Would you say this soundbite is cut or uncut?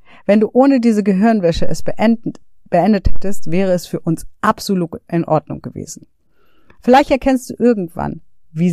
uncut